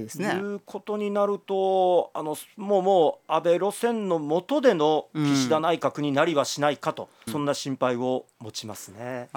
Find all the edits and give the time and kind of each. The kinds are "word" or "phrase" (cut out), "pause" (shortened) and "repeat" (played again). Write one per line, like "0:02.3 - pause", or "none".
0:07.3 - phrase